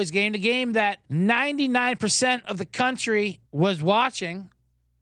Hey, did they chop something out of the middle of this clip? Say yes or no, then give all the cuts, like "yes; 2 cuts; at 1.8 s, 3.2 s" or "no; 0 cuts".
yes; 2 cuts; at 1.0 s, 3.5 s